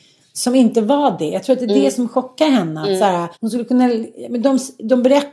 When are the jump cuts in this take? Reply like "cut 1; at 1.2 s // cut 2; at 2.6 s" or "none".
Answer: cut 1; at 3.3 s